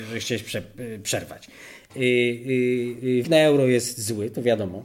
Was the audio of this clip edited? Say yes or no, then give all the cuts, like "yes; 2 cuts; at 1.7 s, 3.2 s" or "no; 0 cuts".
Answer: yes; 1 cut; at 3.2 s